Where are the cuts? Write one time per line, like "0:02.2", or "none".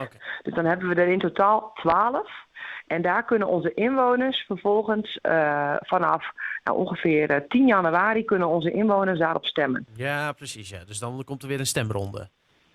none